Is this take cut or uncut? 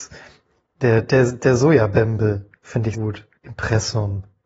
cut